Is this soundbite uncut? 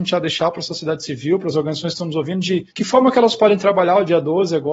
no; 1 cut; at 2.7 s

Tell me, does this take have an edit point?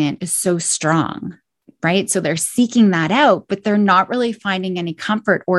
no; 0 cuts

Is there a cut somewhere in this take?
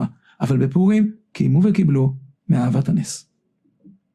no; 0 cuts

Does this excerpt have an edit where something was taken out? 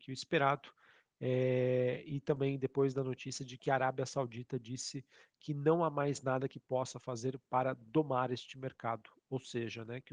no; 0 cuts

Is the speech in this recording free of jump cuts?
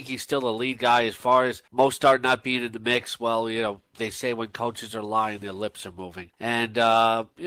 no; 2 cuts; at 1.7 s, 6.3 s

